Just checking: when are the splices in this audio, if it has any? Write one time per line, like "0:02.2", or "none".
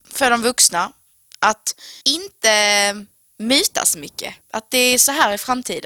0:02.0
0:04.4